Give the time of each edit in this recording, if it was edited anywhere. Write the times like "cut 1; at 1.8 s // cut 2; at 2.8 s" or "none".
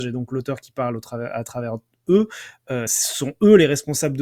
none